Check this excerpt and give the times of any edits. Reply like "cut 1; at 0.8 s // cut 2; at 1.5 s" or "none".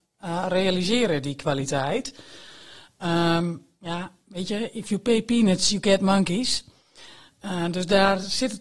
none

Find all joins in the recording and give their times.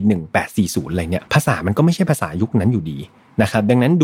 cut 1; at 1.3 s

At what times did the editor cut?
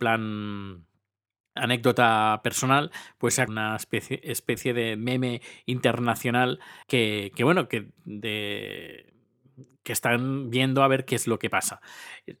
cut 1; at 3.5 s // cut 2; at 6.8 s

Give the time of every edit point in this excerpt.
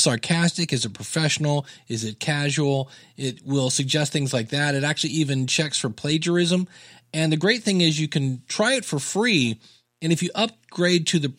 none

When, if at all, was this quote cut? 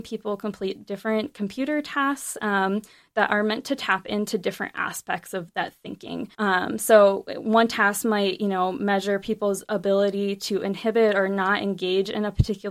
cut 1; at 6.3 s

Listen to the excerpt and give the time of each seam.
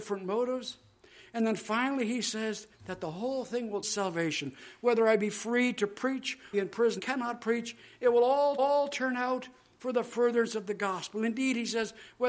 cut 1; at 2.7 s // cut 2; at 3.8 s // cut 3; at 6.5 s // cut 4; at 7.0 s // cut 5; at 8.6 s

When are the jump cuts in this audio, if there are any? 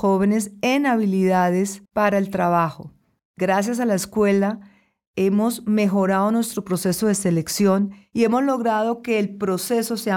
cut 1; at 1.9 s // cut 2; at 3.2 s

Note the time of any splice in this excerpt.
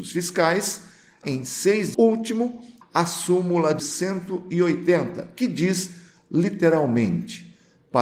cut 1; at 1.2 s // cut 2; at 1.9 s // cut 3; at 2.8 s // cut 4; at 3.8 s

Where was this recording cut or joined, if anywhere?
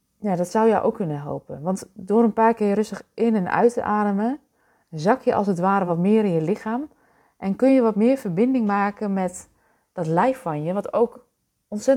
none

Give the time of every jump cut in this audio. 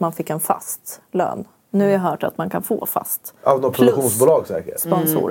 none

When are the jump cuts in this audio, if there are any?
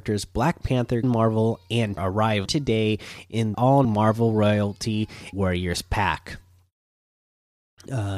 cut 1; at 1.0 s // cut 2; at 2.0 s // cut 3; at 2.5 s // cut 4; at 3.5 s // cut 5; at 3.8 s // cut 6; at 5.3 s

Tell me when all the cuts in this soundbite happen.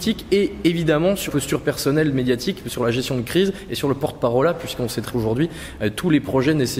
cut 1; at 1.3 s // cut 2; at 5.1 s

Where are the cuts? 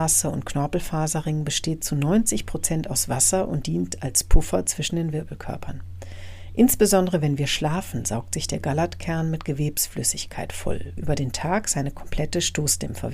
cut 1; at 11.0 s

